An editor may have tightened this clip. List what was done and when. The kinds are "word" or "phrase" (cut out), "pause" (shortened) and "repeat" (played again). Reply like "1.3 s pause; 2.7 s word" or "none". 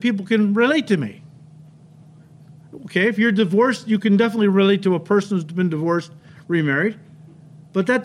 none

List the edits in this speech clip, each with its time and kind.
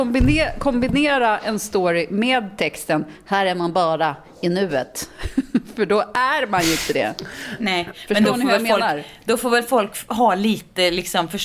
none

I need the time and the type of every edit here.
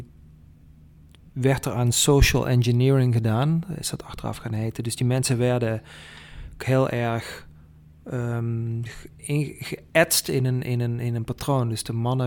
none

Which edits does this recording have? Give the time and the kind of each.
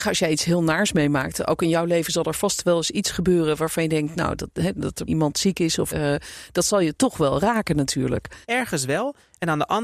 5.1 s word; 5.9 s word; 8.4 s pause

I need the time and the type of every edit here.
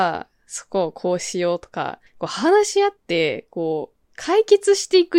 2.1 s pause; 4.0 s pause

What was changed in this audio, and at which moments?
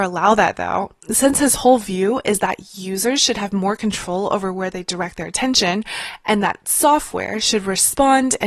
none

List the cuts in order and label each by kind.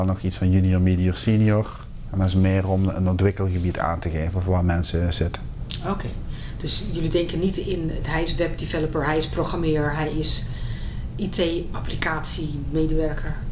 none

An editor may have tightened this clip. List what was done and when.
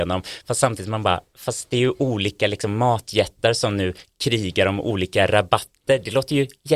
none

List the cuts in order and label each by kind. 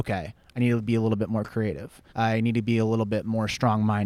2.1 s pause

